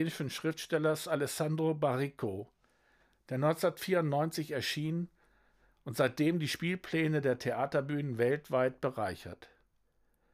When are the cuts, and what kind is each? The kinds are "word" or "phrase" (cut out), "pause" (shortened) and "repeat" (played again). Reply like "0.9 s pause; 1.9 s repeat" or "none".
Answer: none

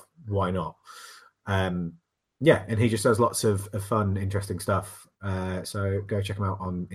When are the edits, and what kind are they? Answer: none

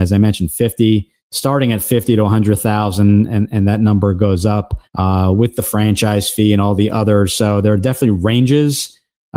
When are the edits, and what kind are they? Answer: 1.2 s pause; 4.9 s pause

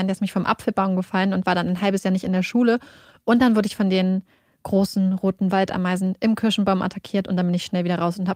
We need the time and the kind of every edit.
none

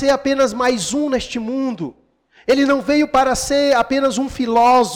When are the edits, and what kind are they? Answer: none

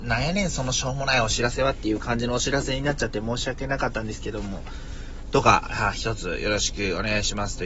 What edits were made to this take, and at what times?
none

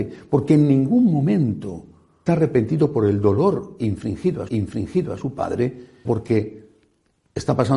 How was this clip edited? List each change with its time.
2.3 s word; 4.5 s repeat; 6.0 s word

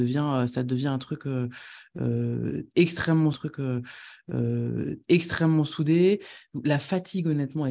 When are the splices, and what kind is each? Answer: 3.3 s repeat

